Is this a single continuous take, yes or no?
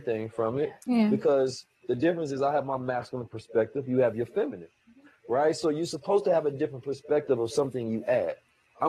yes